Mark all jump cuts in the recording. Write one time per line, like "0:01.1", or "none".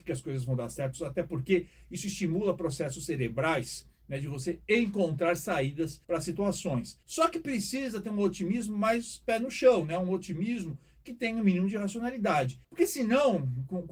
0:06.0
0:07.0
0:12.6